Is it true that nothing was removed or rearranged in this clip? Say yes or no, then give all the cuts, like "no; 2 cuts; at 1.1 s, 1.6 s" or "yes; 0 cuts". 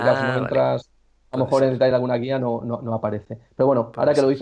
yes; 0 cuts